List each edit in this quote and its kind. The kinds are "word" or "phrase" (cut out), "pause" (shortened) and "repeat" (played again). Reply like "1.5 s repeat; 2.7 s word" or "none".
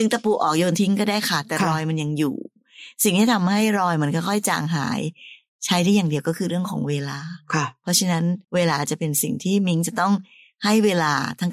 8.4 s pause